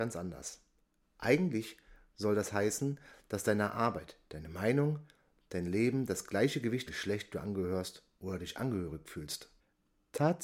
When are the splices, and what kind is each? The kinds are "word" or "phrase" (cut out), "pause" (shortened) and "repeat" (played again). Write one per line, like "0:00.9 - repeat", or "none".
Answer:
0:06.9 - phrase